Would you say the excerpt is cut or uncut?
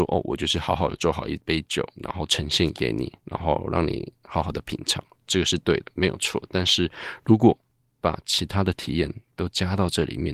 uncut